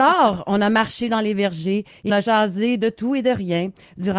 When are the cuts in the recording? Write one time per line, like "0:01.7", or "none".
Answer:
0:02.1